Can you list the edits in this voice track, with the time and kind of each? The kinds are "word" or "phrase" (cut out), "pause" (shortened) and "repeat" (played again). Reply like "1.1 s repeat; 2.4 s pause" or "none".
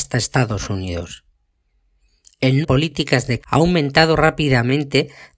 2.6 s phrase; 3.4 s word